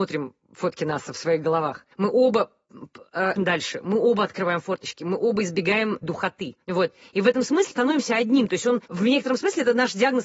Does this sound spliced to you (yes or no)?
yes